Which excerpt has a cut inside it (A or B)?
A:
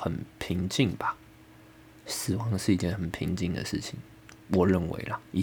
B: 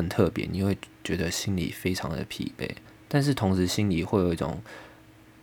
B